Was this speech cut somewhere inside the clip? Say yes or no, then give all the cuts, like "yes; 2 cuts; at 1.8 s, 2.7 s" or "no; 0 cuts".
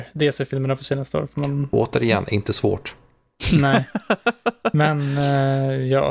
no; 0 cuts